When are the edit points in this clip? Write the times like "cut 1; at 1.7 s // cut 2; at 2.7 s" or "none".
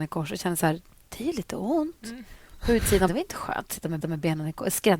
cut 1; at 3.1 s // cut 2; at 4.0 s